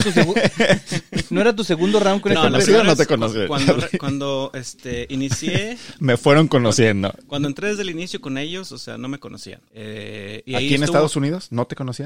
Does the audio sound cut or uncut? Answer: cut